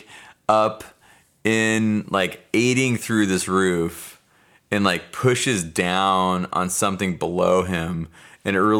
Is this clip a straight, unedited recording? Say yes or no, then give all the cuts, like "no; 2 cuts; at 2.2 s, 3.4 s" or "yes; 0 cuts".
yes; 0 cuts